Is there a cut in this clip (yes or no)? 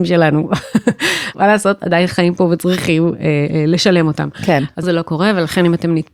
yes